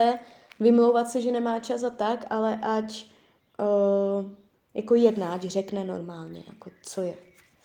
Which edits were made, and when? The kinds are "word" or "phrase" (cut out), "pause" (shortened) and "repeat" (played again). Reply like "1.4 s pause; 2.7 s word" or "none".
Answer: 4.5 s pause